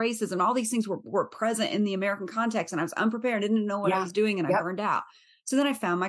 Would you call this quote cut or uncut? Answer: uncut